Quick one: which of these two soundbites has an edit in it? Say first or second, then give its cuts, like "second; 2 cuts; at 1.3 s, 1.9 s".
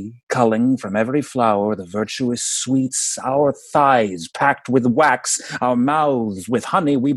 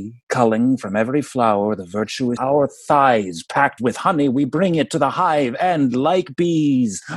second; 2 cuts; at 2.4 s, 3.8 s